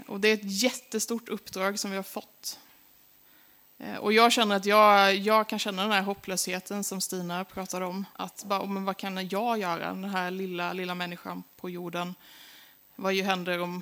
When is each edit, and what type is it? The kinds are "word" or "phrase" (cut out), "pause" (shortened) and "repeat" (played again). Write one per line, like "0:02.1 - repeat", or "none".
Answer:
0:08.1 - pause